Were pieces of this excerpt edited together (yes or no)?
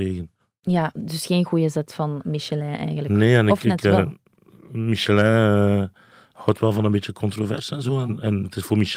no